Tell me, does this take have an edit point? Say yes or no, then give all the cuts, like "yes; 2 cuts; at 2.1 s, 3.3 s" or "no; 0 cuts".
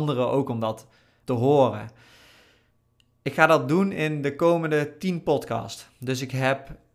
no; 0 cuts